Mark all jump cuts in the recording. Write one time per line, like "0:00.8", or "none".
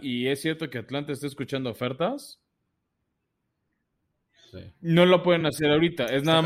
none